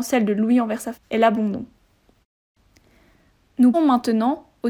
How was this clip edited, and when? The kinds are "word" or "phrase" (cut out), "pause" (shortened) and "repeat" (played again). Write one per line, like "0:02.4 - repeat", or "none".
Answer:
0:00.9 - word
0:03.7 - word

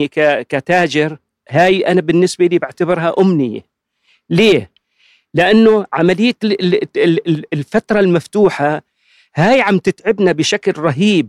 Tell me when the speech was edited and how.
none

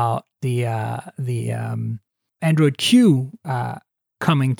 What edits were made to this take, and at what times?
0:02.4 - word

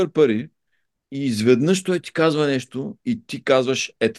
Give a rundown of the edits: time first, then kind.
none

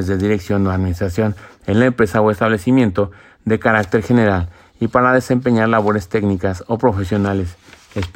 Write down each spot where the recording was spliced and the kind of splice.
none

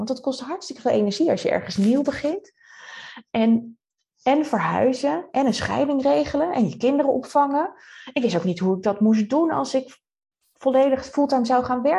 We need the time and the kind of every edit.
none

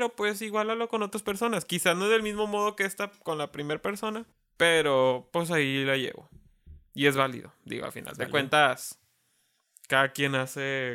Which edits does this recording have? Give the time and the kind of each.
0:04.3 - pause

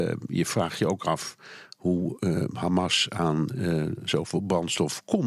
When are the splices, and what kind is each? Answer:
none

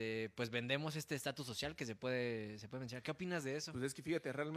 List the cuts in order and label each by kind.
none

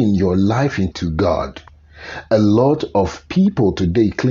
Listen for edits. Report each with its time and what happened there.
0:00.9 - word

